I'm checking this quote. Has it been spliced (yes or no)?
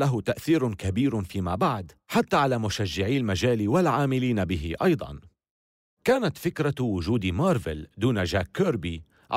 no